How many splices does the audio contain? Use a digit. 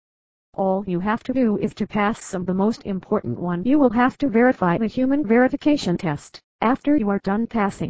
2